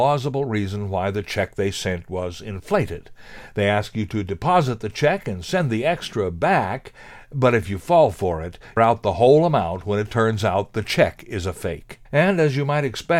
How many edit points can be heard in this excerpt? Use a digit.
2